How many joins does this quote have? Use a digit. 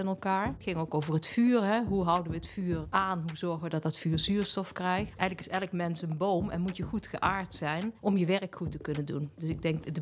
0